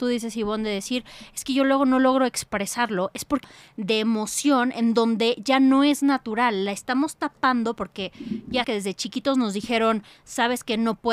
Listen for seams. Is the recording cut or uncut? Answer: cut